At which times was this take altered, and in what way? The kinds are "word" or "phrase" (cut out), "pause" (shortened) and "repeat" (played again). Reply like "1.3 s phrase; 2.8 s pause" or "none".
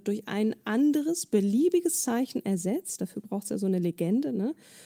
none